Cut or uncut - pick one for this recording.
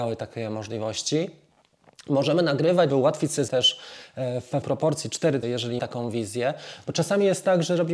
cut